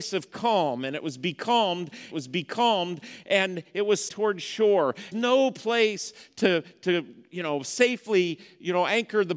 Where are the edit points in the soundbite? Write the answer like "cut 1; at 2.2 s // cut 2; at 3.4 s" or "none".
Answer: cut 1; at 2.1 s // cut 2; at 4.1 s // cut 3; at 5.1 s